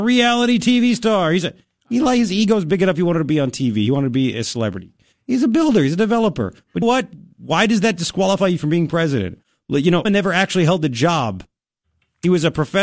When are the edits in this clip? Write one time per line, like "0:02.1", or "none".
0:06.8
0:10.0

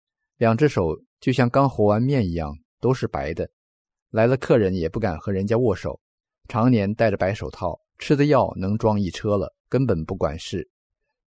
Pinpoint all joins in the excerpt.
0:07.9
0:09.6

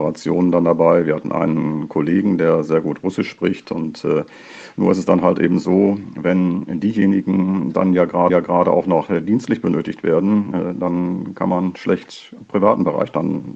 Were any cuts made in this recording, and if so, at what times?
0:08.3

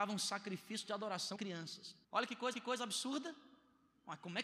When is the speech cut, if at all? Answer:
0:01.4
0:02.0
0:02.5

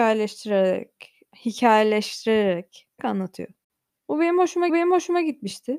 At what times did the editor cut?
0:03.0
0:04.7

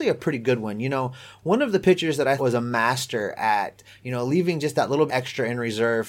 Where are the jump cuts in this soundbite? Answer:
0:02.4
0:05.1

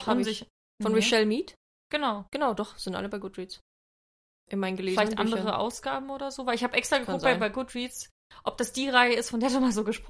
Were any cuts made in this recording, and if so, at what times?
none

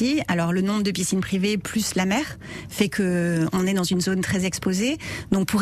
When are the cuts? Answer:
none

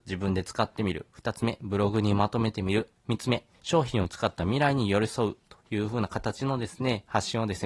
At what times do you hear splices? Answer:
0:03.5

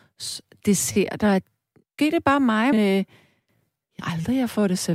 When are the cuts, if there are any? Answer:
0:02.0
0:02.7
0:04.0

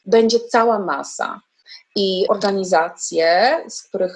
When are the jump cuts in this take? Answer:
0:02.3

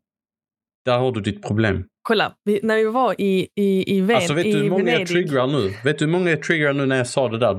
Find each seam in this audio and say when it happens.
0:02.0

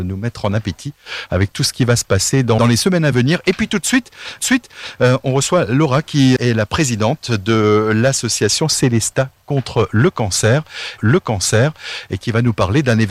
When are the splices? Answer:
0:02.6
0:04.4
0:06.4
0:11.0

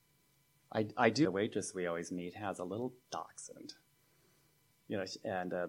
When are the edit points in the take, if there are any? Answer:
0:01.2

